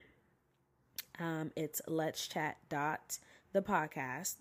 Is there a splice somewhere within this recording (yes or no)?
no